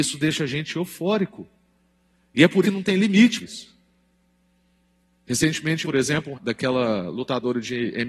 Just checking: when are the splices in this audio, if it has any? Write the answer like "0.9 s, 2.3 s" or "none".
2.6 s, 3.4 s, 5.8 s, 6.3 s